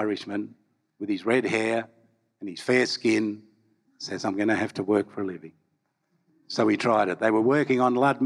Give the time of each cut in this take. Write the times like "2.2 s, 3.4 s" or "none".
none